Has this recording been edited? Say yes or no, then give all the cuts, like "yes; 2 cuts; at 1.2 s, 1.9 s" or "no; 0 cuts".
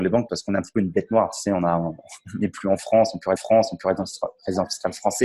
yes; 1 cut; at 3.4 s